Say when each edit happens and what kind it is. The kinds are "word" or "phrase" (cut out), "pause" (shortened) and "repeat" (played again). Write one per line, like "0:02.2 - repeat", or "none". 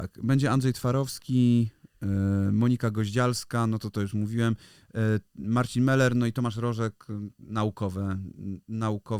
none